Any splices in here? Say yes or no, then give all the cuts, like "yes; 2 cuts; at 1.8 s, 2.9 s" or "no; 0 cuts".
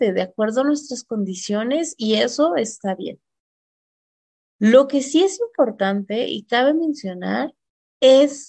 no; 0 cuts